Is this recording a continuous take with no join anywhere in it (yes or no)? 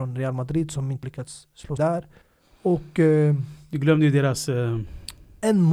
no